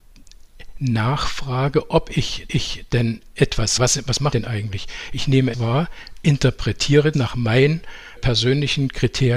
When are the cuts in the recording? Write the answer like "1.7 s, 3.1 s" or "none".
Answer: 2.5 s, 3.8 s, 4.3 s, 5.5 s, 7.1 s, 8.2 s